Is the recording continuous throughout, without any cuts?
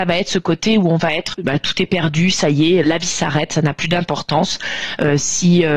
no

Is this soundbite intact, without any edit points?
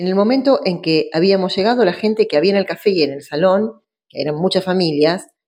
yes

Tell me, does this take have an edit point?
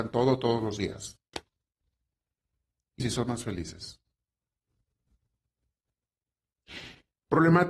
yes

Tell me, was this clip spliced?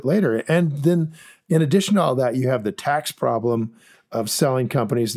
no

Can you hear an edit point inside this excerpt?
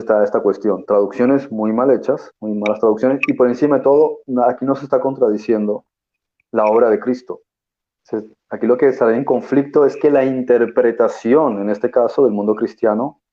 no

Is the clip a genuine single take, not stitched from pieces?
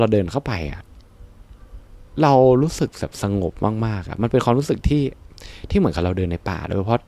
yes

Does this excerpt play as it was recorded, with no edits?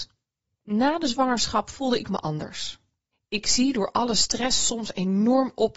yes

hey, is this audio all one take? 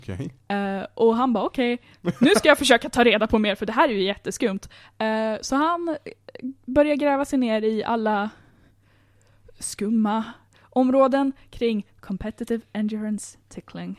yes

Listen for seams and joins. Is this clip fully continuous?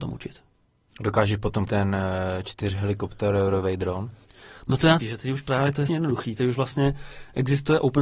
no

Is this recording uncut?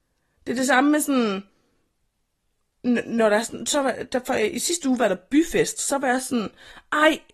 yes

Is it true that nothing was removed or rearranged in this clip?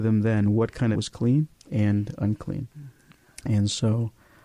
no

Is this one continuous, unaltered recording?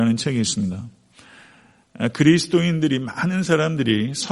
yes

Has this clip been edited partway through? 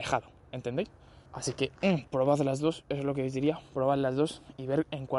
yes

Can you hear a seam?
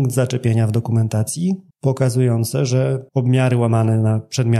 yes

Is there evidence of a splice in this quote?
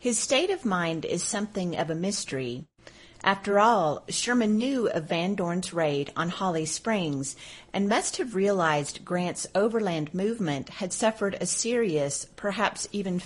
no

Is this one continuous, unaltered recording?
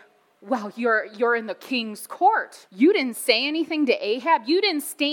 no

